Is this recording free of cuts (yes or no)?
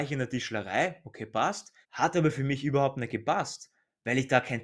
no